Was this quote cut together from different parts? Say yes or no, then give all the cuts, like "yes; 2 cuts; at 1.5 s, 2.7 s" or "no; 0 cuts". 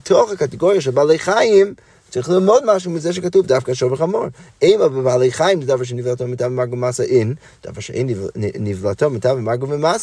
no; 0 cuts